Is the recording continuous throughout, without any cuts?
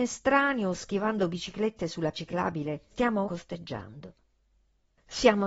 no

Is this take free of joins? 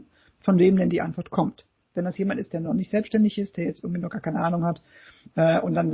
yes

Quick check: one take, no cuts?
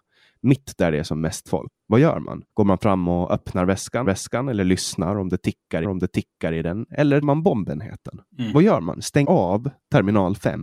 no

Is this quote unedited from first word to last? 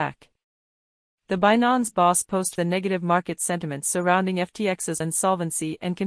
no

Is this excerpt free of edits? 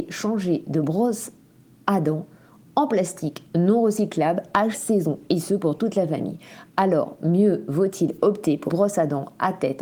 no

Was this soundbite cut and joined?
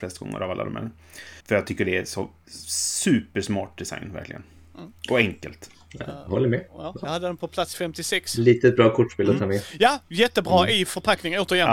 yes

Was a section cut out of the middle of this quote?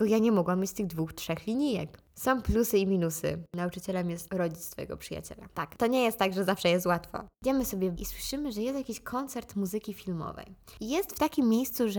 yes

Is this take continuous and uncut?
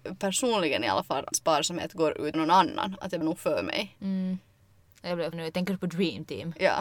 no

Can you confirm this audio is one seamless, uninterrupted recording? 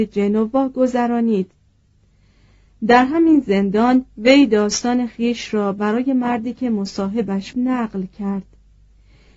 no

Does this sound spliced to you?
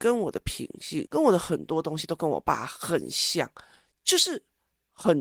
no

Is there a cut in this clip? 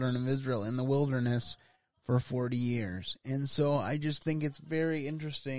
no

